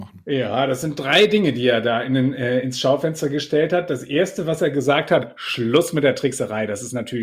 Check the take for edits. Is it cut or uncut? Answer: uncut